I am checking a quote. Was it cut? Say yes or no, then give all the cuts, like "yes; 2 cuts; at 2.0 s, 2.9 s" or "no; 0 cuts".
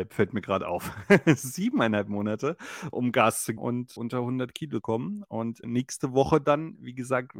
yes; 5 cuts; at 2.9 s, 3.6 s, 4.0 s, 4.8 s, 5.6 s